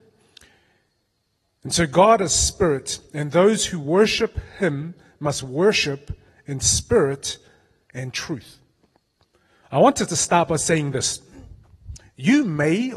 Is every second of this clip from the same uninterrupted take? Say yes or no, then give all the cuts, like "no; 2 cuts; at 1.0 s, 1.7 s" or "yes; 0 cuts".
yes; 0 cuts